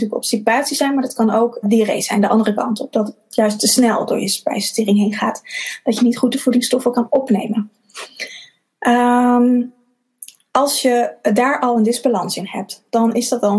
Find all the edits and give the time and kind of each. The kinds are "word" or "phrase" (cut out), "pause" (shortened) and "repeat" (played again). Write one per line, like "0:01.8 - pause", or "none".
0:01.6 - word